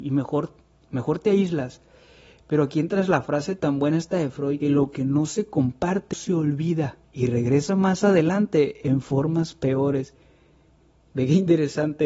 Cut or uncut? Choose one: cut